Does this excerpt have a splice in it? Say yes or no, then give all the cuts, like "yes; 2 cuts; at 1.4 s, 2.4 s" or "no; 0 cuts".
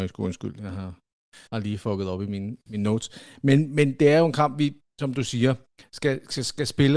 yes; 1 cut; at 1.5 s